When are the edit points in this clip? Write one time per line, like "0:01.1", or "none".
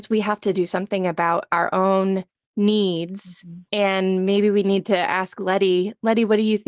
0:03.7